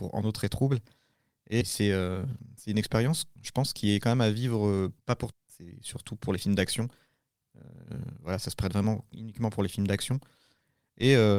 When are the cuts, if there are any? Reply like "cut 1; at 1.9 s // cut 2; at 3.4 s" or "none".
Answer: cut 1; at 1.6 s // cut 2; at 3.4 s // cut 3; at 5.0 s // cut 4; at 5.3 s